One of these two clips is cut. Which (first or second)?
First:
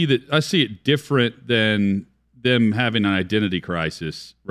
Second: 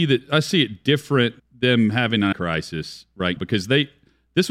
second